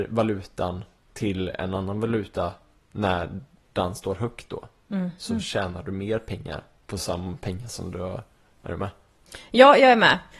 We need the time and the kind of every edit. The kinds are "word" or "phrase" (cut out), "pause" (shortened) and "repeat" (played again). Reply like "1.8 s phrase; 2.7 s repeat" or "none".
none